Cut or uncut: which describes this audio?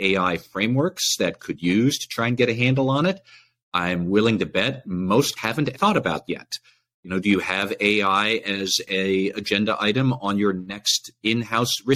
cut